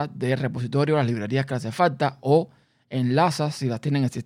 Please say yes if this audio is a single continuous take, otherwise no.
yes